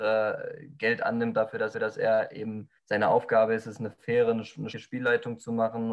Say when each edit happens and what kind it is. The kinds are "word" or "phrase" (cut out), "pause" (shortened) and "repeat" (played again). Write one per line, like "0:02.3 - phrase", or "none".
0:01.7 - repeat
0:02.8 - pause
0:04.7 - word